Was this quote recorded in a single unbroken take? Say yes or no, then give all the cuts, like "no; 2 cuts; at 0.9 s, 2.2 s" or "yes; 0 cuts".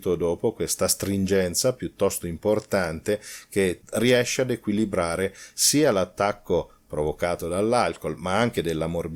yes; 0 cuts